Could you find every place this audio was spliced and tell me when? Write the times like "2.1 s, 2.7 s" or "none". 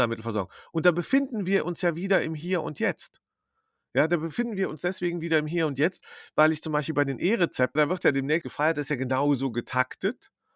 7.8 s, 8.4 s